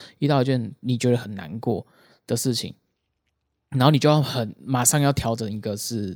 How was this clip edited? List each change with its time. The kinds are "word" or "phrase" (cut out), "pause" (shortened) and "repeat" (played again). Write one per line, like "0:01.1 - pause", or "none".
none